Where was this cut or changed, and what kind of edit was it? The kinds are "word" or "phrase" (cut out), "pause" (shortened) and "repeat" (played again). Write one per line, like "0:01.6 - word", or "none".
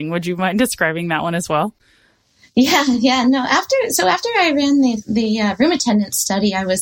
none